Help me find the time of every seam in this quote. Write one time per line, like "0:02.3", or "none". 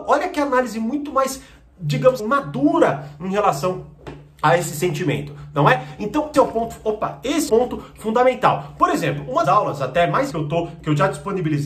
0:02.2
0:06.3
0:07.5
0:09.4
0:10.3